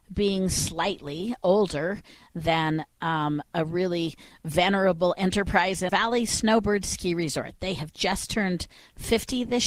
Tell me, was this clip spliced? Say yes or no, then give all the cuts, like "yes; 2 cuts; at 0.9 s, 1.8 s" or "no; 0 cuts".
yes; 1 cut; at 5.9 s